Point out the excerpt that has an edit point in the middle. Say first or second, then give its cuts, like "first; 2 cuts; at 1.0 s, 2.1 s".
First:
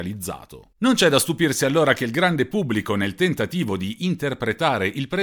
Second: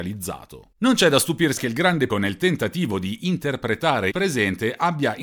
second; 3 cuts; at 1.6 s, 2.1 s, 4.1 s